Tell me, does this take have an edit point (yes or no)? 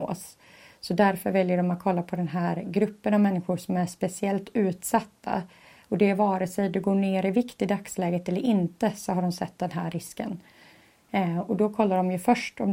no